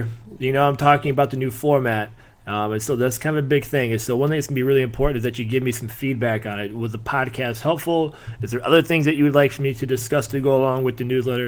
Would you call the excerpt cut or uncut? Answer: uncut